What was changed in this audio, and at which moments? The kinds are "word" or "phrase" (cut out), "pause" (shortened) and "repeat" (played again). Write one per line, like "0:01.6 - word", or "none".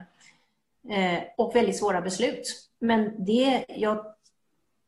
0:01.3 - pause